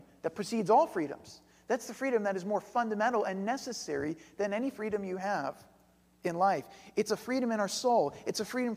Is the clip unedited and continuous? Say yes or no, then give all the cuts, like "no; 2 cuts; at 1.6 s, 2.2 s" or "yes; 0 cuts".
yes; 0 cuts